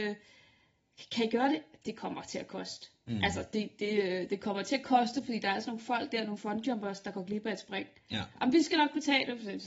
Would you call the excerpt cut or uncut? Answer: uncut